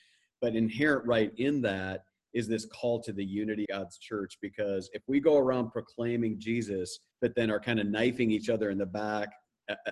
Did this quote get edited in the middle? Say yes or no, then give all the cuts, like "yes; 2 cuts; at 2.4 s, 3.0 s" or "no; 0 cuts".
yes; 2 cuts; at 3.7 s, 7.1 s